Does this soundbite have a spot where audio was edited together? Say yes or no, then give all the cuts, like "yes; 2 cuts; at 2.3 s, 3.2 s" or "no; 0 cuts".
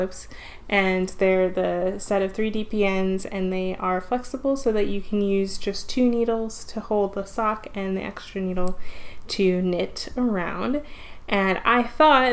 no; 0 cuts